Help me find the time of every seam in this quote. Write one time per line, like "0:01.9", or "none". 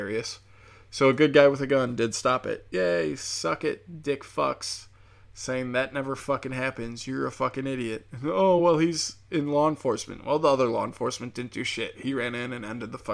none